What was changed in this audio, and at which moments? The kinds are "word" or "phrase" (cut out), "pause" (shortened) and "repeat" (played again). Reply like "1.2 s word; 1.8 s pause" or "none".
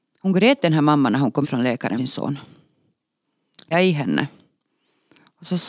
1.4 s word; 2.0 s word; 3.7 s word